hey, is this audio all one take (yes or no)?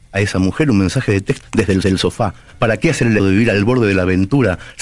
no